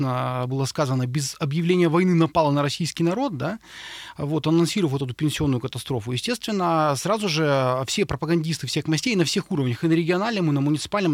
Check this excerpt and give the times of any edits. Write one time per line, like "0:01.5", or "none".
none